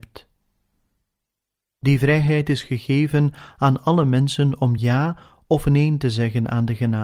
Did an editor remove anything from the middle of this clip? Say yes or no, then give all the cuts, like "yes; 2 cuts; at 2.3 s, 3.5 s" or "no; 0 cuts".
no; 0 cuts